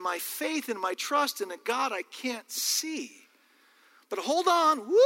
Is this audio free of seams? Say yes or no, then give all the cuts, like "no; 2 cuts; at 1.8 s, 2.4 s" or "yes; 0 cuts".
yes; 0 cuts